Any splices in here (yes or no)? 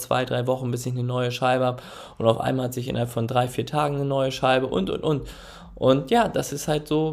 no